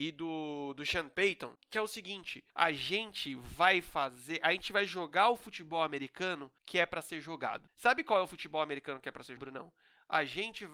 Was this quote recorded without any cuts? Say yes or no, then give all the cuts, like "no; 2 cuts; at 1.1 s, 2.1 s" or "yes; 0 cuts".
no; 2 cuts; at 2.5 s, 9.4 s